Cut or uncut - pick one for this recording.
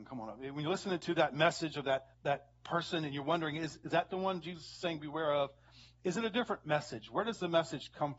cut